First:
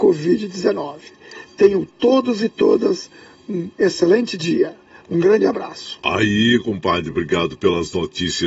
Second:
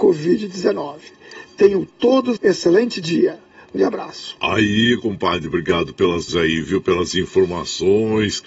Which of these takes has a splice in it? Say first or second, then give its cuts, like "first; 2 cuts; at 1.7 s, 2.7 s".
second; 3 cuts; at 2.4 s, 3.8 s, 6.3 s